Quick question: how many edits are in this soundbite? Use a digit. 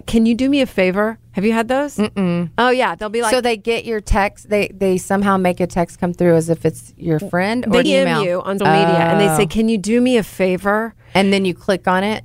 3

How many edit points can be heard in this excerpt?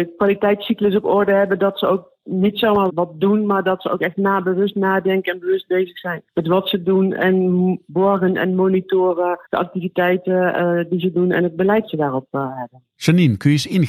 3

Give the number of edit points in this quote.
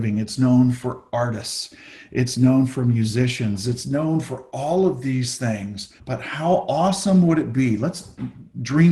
1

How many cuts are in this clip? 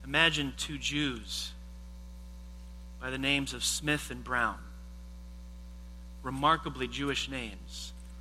0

